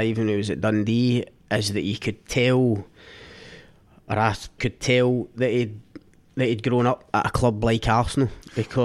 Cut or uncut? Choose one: cut